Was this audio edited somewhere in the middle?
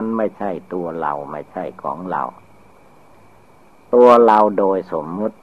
no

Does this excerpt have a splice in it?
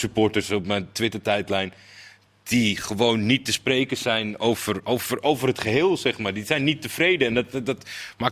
no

